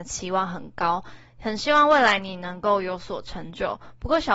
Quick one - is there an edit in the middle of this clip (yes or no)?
no